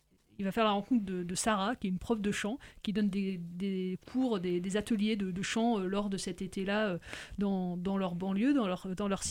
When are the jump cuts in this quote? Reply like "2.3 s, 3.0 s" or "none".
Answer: none

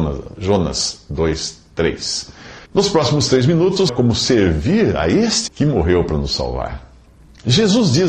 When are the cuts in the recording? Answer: 2.6 s, 3.9 s, 5.5 s

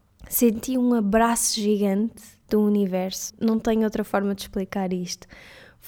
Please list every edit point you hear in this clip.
3.3 s

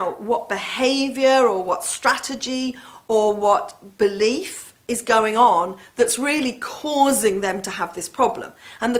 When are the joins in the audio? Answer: none

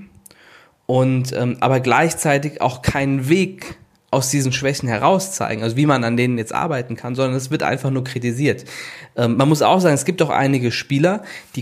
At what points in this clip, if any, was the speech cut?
none

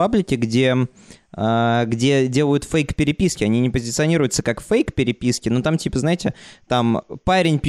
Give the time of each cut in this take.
none

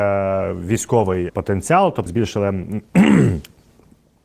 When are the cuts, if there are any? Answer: 1.3 s, 2.1 s

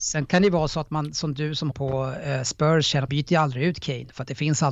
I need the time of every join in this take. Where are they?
1.7 s, 3.1 s

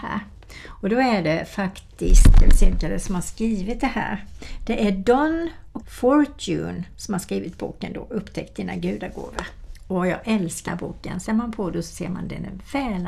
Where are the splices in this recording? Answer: 5.8 s, 10.7 s, 11.3 s

